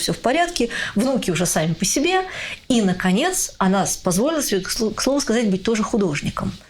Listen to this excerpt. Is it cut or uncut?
uncut